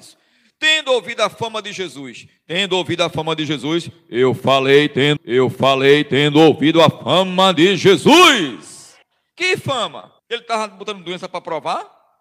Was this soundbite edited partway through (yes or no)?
yes